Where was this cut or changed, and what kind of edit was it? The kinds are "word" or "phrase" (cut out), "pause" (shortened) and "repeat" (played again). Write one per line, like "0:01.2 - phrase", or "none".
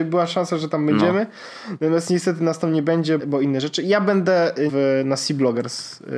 0:03.2 - word
0:04.7 - word